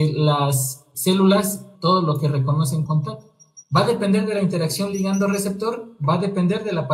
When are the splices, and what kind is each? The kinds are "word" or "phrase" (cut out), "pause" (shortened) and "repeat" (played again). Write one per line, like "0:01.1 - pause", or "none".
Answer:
0:00.9 - word
0:01.7 - word
0:02.9 - word
0:03.6 - pause